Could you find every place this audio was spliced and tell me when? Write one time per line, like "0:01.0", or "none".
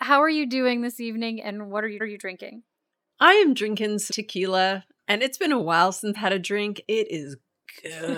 0:02.0
0:04.1
0:06.1
0:06.8